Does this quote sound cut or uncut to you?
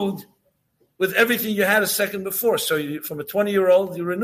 uncut